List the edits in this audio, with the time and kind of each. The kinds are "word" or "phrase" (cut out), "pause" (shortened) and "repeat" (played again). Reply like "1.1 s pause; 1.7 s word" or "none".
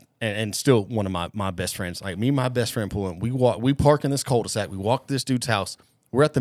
none